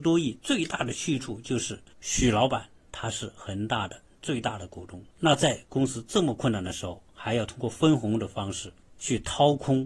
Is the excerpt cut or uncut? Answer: cut